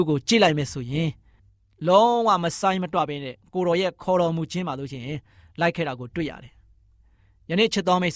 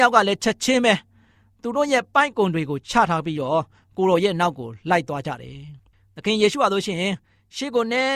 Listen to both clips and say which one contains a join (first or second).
second